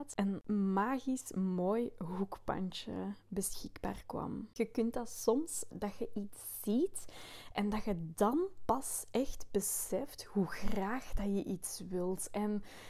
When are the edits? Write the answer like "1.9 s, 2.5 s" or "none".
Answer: 5.7 s